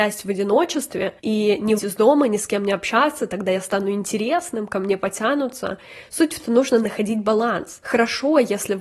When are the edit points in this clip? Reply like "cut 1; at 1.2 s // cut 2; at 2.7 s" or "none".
cut 1; at 1.2 s // cut 2; at 1.8 s // cut 3; at 6.4 s